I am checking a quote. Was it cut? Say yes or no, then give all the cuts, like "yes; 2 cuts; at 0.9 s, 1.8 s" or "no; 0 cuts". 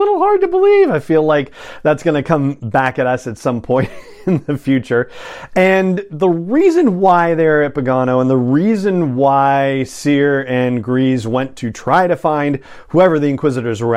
no; 0 cuts